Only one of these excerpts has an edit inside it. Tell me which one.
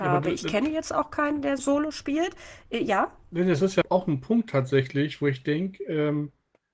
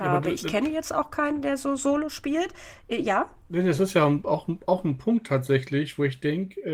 first; 2 cuts; at 1.6 s, 3.8 s

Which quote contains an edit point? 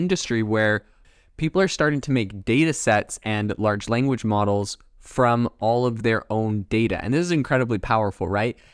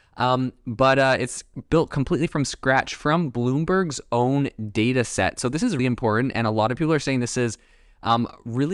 second; 1 cut; at 5.8 s

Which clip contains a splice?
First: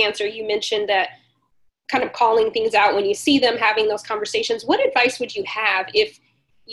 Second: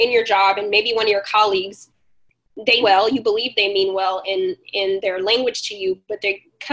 second; 1 cut; at 2.8 s

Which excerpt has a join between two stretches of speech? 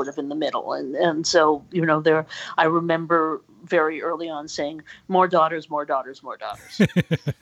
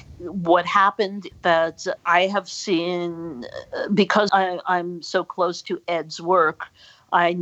second; 2 cuts; at 2.0 s, 4.3 s

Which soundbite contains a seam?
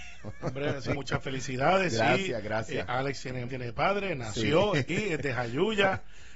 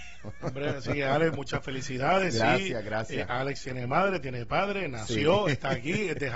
first; 3 cuts; at 0.9 s, 3.5 s, 4.9 s

